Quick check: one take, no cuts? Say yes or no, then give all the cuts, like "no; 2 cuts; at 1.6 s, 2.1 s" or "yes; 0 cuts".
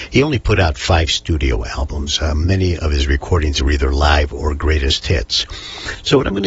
yes; 0 cuts